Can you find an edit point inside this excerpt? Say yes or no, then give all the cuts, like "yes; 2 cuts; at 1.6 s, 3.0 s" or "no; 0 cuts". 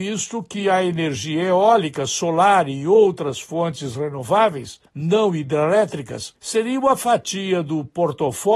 no; 0 cuts